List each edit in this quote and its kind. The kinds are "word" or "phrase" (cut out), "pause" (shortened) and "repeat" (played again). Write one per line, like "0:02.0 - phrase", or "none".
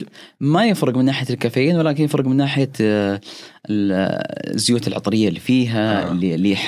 none